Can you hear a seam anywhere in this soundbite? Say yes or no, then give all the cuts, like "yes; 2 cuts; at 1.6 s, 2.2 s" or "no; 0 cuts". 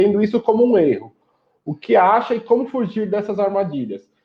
no; 0 cuts